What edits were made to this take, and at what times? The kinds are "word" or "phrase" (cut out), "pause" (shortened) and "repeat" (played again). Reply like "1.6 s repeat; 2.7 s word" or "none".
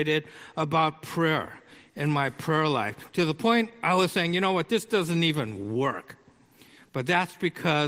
none